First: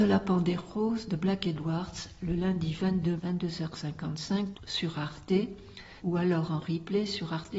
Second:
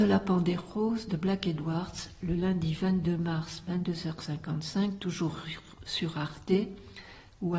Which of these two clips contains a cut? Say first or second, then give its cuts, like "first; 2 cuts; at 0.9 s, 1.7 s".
first; 3 cuts; at 3.2 s, 4.5 s, 6.0 s